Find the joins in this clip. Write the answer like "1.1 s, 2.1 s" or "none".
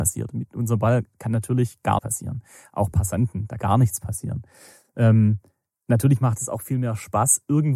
2.0 s, 3.6 s